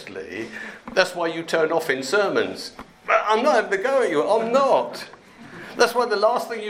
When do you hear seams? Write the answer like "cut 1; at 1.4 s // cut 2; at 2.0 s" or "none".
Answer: none